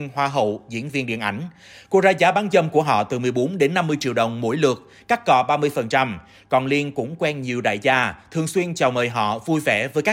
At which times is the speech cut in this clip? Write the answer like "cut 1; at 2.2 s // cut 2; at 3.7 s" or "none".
none